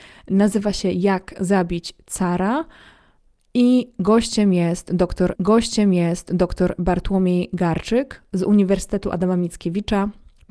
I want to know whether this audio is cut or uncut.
cut